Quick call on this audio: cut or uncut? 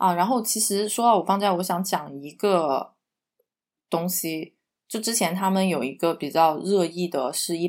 uncut